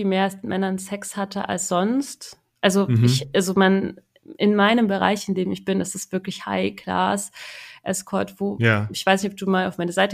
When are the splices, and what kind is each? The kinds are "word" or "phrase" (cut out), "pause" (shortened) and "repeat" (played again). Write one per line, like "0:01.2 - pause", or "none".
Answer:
none